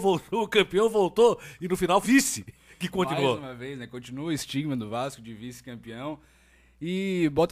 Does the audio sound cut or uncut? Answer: cut